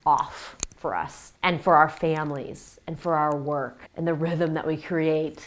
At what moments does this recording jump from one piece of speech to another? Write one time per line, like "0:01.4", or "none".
0:01.4
0:03.9